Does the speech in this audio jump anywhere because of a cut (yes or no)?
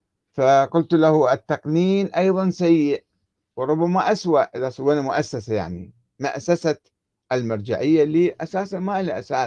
no